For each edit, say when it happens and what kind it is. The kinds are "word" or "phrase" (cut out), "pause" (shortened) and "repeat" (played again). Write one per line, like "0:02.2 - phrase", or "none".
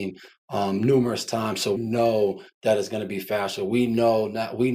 0:01.8 - word

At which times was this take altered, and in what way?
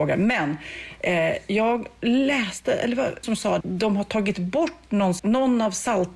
0:03.2 - word
0:03.6 - word
0:05.2 - word

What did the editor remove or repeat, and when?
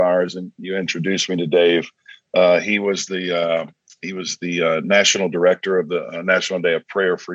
none

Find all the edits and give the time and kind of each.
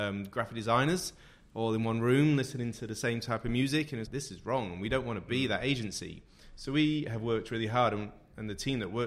0:04.0 - word

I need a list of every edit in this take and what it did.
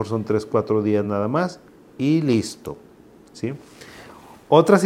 none

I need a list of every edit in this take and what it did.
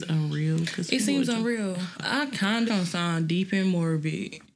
0:02.7 - phrase

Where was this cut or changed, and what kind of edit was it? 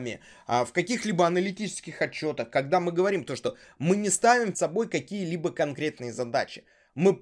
0:04.5 - word

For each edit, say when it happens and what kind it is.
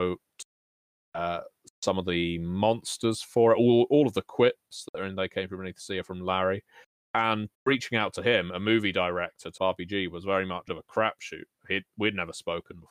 0:07.5 - pause
0:09.6 - phrase
0:10.7 - phrase

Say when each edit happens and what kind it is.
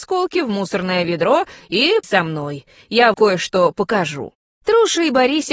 0:02.0 - word
0:03.1 - word

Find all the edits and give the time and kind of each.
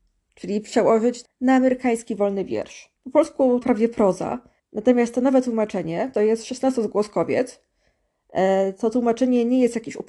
0:01.2 - word
0:03.0 - pause
0:03.6 - phrase
0:04.6 - pause
0:06.1 - phrase

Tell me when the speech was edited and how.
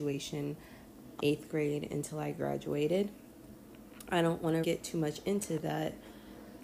0:01.2 - word
0:04.6 - word

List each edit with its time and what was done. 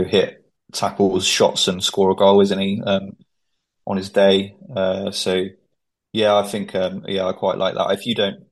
none

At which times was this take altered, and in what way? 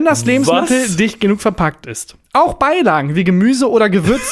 0:02.2 - pause

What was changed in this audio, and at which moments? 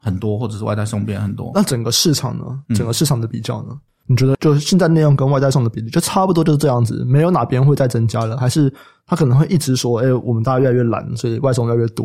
0:02.7 - pause
0:04.3 - phrase

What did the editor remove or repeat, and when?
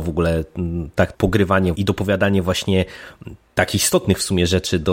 0:01.1 - word
0:01.7 - phrase

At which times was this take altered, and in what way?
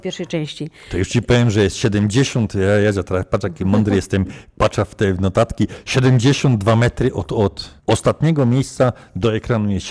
0:07.8 - pause

